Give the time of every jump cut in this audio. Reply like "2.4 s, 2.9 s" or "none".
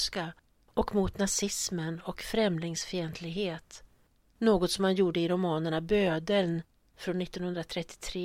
none